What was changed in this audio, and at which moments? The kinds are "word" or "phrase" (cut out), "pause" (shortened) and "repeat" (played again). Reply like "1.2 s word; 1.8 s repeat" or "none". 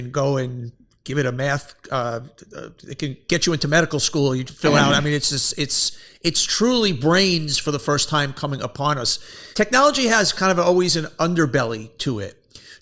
4.5 s word; 9.5 s pause